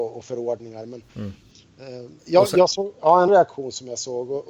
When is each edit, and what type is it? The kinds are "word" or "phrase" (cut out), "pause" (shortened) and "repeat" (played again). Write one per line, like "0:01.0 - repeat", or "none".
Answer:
0:01.1 - pause
0:02.2 - pause
0:03.3 - word